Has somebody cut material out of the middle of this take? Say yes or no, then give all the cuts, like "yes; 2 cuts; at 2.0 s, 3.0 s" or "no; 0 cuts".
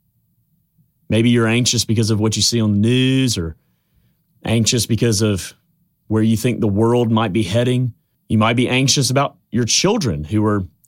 yes; 1 cut; at 8.1 s